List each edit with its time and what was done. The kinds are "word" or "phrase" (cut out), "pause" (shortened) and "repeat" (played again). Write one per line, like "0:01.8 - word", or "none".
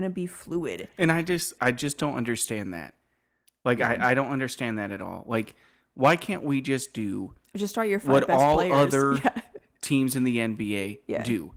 0:01.6 - word